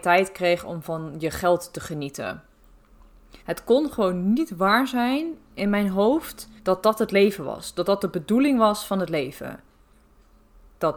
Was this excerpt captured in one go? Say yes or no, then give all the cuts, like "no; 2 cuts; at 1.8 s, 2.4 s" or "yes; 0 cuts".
no; 2 cuts; at 3.4 s, 6.6 s